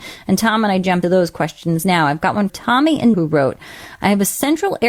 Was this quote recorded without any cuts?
no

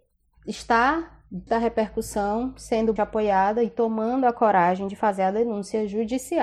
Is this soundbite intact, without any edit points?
no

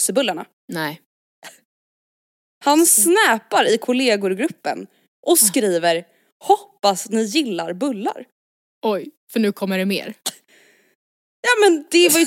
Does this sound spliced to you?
no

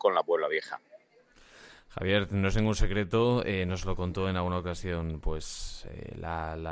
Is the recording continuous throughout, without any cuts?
yes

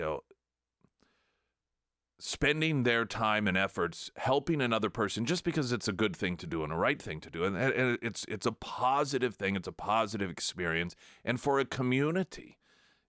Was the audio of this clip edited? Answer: no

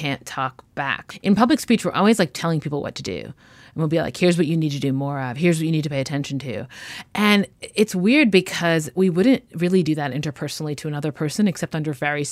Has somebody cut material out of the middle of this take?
no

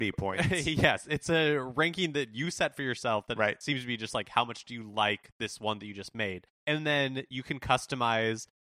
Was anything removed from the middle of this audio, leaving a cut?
yes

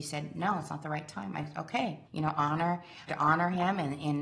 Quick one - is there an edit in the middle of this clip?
yes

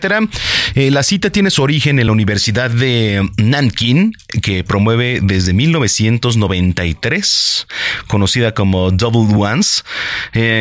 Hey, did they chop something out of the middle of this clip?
no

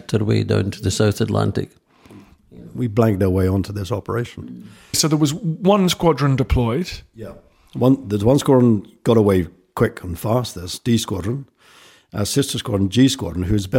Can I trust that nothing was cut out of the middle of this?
yes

